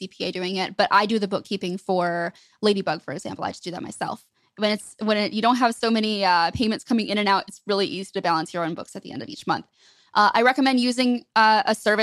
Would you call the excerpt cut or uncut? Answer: uncut